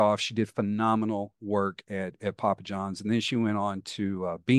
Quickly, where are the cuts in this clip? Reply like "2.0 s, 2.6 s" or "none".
none